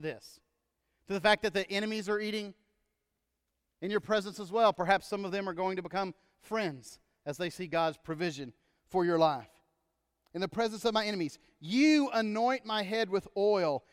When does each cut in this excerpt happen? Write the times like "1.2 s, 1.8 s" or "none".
none